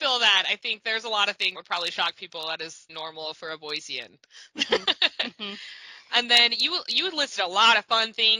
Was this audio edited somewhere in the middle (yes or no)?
yes